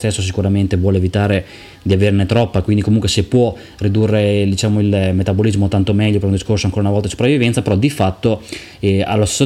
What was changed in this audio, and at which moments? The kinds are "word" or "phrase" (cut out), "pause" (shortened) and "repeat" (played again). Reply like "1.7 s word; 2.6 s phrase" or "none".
none